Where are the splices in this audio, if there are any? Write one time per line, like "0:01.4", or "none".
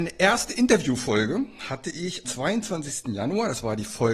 0:02.2